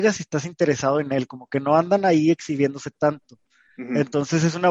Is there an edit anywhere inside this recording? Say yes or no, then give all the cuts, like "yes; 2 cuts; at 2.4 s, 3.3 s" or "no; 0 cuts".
no; 0 cuts